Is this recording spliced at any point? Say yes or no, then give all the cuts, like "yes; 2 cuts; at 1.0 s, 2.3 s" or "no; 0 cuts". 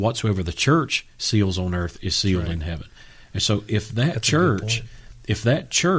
no; 0 cuts